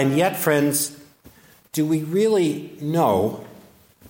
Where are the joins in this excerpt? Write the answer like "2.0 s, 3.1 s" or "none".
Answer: none